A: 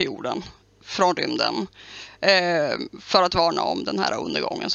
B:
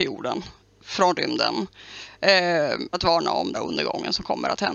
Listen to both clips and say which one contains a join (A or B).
B